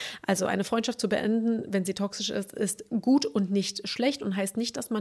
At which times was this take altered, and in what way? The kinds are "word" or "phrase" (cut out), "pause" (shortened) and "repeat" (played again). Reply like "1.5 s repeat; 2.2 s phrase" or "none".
none